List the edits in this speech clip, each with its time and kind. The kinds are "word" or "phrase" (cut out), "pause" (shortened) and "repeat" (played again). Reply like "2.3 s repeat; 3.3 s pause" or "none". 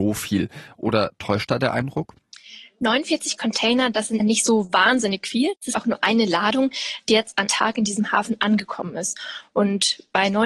4.2 s word; 5.7 s phrase; 7.5 s word